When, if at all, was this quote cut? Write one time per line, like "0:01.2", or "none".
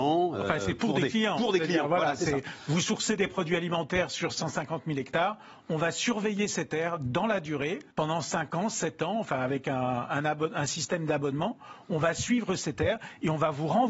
0:07.9